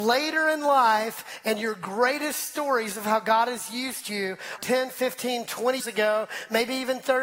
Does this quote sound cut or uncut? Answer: cut